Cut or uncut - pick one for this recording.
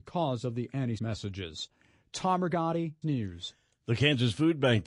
cut